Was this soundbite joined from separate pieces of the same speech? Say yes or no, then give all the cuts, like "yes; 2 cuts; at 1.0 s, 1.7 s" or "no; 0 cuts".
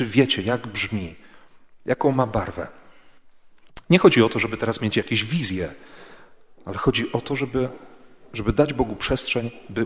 no; 0 cuts